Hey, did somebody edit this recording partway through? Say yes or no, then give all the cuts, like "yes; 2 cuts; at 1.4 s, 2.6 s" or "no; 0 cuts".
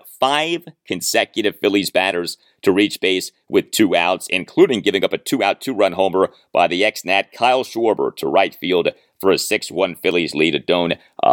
no; 0 cuts